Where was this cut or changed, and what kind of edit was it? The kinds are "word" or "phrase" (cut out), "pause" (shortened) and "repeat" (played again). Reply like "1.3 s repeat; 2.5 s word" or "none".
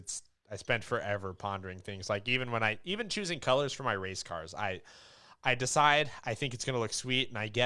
none